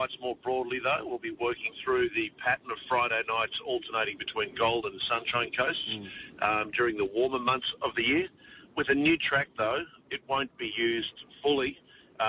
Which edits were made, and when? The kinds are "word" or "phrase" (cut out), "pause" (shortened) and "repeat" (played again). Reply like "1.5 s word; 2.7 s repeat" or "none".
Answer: none